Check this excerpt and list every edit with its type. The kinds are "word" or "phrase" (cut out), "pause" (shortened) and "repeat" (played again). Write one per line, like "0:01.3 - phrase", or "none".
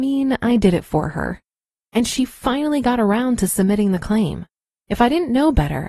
none